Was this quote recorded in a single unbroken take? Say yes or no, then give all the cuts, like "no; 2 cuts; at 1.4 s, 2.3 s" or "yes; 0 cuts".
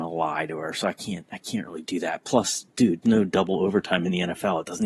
no; 1 cut; at 3.0 s